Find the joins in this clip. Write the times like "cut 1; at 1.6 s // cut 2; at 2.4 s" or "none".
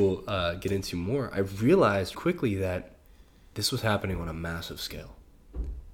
cut 1; at 2.1 s